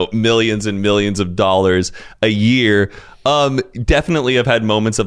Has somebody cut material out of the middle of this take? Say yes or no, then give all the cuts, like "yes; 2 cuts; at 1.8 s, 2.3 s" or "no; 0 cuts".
no; 0 cuts